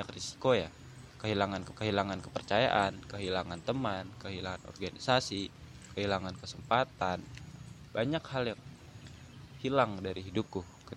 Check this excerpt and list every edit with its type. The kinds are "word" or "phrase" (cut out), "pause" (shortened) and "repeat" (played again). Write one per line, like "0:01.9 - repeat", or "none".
0:01.7 - repeat